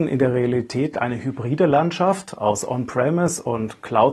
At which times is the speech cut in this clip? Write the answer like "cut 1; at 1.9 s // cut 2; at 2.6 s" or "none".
cut 1; at 0.9 s